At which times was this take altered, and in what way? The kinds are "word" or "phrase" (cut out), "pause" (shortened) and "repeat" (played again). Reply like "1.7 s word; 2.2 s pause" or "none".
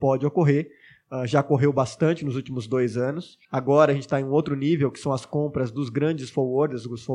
3.4 s pause